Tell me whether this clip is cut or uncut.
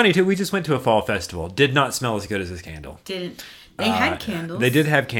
uncut